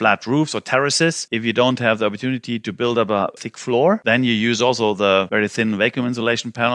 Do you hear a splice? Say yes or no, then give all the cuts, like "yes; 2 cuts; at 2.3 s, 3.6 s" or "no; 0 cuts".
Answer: yes; 1 cut; at 3.4 s